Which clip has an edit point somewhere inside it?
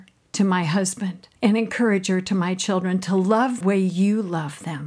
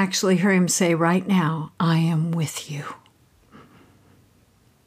first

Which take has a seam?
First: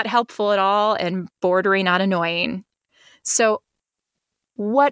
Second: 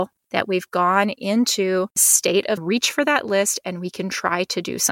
second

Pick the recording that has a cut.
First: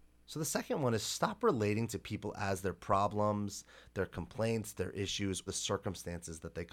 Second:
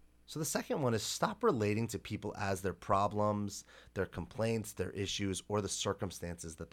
first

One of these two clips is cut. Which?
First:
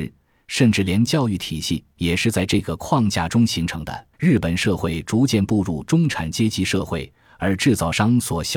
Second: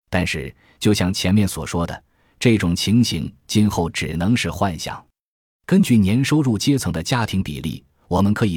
first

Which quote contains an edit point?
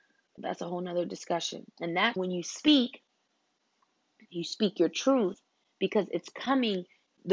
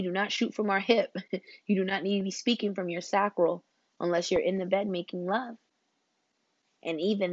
first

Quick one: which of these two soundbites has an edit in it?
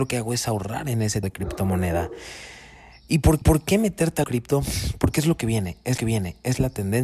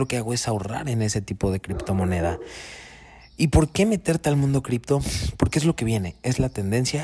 first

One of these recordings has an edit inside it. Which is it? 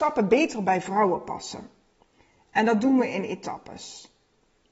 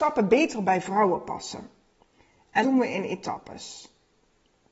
second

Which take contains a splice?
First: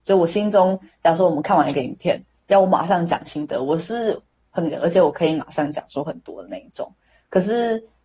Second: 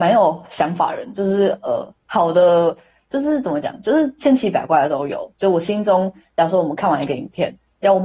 first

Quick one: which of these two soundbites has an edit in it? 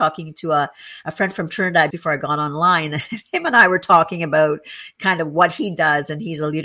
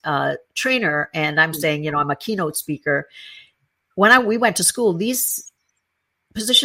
first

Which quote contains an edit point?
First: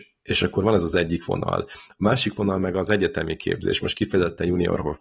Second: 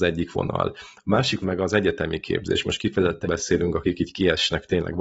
second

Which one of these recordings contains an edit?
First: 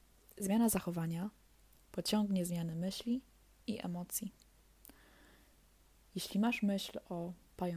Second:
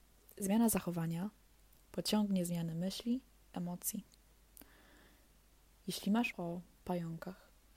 second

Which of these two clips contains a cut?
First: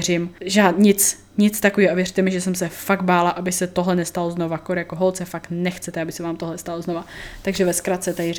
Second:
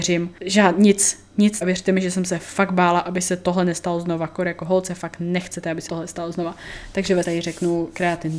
second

